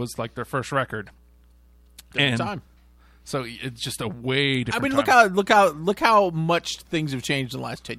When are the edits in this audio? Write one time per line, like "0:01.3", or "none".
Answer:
none